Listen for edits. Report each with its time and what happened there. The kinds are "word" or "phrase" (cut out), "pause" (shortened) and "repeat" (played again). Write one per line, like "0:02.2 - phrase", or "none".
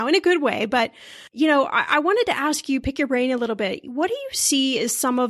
0:01.3 - pause